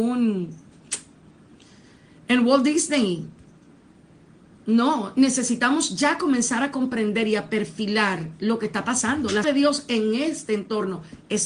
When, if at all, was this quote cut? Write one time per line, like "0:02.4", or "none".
0:09.4